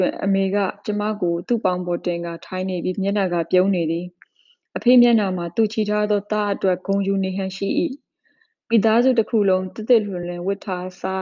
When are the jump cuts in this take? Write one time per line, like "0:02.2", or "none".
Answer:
none